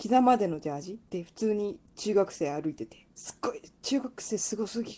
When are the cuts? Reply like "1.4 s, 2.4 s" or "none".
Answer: 1.1 s, 3.1 s